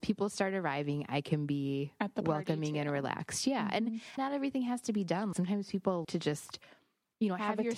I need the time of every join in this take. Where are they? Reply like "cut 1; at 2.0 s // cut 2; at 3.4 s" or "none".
cut 1; at 4.2 s // cut 2; at 5.3 s // cut 3; at 6.0 s